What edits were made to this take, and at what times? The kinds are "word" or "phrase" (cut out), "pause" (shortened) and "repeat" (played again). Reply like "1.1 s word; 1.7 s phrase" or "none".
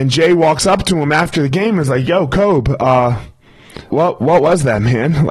3.9 s word